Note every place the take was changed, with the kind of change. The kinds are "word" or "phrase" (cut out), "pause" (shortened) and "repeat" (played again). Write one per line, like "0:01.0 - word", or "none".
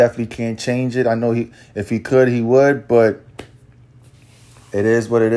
none